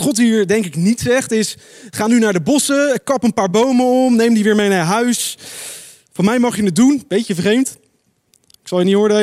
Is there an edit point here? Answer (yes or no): no